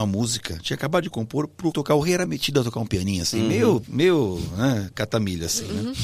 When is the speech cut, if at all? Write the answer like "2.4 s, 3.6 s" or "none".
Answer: 1.7 s, 2.3 s, 3.8 s